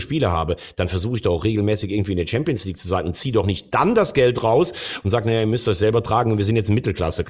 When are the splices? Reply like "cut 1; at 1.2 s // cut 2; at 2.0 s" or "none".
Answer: none